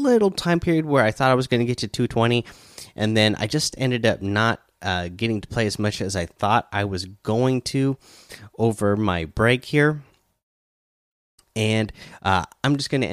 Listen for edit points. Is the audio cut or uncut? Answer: uncut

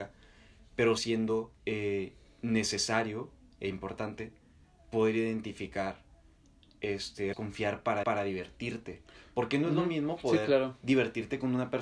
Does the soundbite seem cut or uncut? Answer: cut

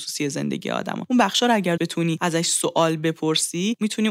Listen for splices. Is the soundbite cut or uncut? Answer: cut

